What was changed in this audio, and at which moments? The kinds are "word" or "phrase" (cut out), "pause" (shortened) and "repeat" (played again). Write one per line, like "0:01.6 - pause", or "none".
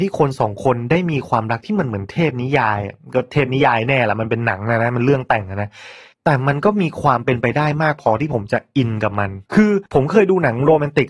0:06.1 - pause
0:09.5 - pause
0:09.9 - pause